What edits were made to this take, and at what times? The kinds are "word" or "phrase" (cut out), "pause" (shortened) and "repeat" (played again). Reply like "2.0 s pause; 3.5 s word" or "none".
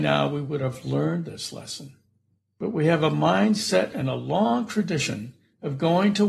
none